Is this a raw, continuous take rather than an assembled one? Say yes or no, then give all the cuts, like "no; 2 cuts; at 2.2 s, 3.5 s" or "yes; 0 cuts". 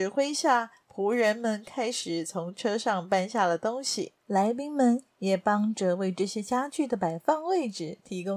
no; 1 cut; at 4.2 s